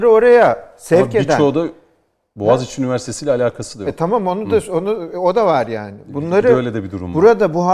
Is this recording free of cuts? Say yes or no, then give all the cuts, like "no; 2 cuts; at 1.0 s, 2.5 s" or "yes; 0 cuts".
yes; 0 cuts